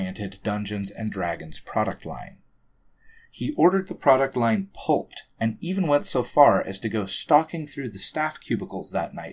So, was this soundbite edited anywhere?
no; 0 cuts

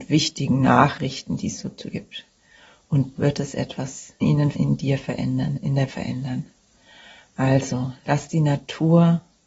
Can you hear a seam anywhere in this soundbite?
yes; 5 cuts; at 1.9 s, 3.2 s, 4.2 s, 4.5 s, 5.9 s

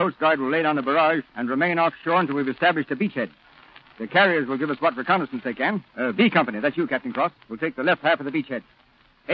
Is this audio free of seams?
no; 3 cuts; at 1.3 s, 5.9 s, 7.4 s

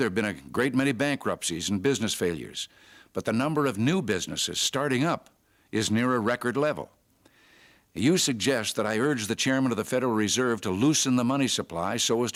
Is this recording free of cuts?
yes; 0 cuts

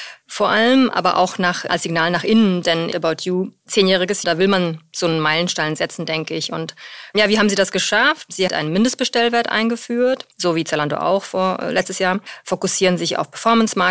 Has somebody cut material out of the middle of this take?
yes; 5 cuts; at 1.7 s, 2.9 s, 4.2 s, 8.5 s, 10.3 s

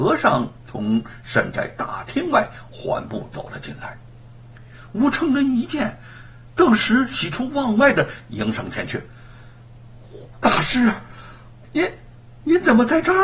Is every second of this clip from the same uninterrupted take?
no; 1 cut; at 11.6 s

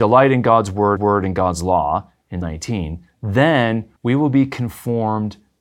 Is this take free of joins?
no; 3 cuts; at 1.0 s, 2.4 s, 4.0 s

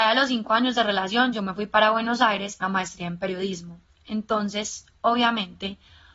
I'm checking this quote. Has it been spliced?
yes; 1 cut; at 2.6 s

